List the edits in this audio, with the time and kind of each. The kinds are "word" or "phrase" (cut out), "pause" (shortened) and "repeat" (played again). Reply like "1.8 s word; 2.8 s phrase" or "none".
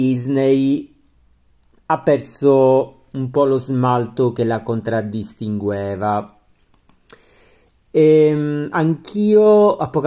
none